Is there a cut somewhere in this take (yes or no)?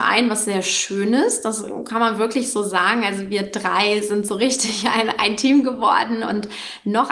no